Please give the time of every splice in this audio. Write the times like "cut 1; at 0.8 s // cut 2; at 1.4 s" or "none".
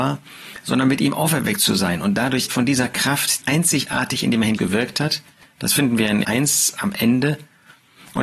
cut 1; at 2.5 s // cut 2; at 3.4 s // cut 3; at 4.6 s // cut 4; at 6.2 s